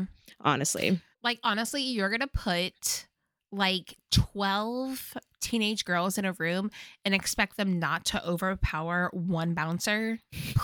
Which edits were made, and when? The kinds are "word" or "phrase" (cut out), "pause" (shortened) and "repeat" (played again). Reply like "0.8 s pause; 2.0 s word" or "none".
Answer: 1.1 s pause